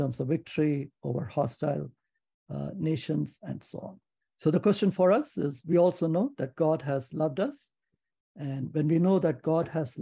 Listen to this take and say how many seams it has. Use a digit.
0